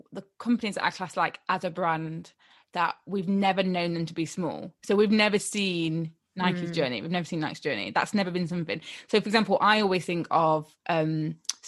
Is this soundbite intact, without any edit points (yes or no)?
yes